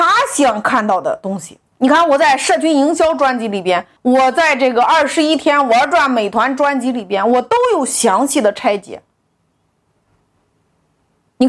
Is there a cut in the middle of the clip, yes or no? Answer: yes